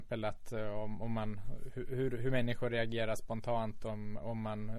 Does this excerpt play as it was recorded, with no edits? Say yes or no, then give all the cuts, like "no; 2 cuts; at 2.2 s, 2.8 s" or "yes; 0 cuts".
yes; 0 cuts